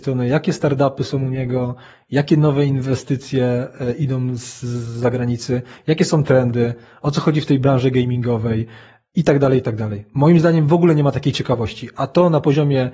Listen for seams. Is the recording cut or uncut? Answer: uncut